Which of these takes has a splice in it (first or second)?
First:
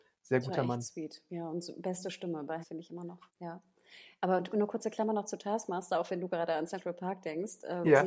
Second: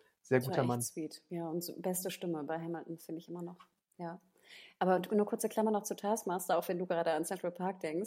first